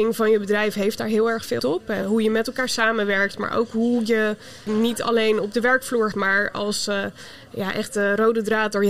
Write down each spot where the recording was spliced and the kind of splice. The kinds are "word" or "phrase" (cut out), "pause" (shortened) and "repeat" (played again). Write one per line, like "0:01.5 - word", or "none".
0:01.6 - word
0:02.0 - word
0:04.7 - word
0:06.1 - word